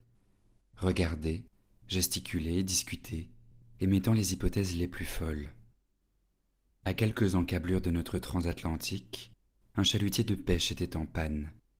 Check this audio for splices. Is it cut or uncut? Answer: uncut